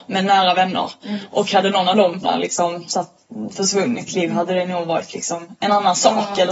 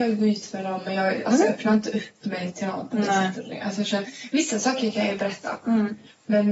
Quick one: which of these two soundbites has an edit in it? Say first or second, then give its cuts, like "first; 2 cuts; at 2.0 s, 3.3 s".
first; 2 cuts; at 2.2 s, 4.1 s